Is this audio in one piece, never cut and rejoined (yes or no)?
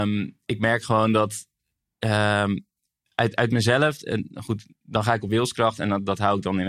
yes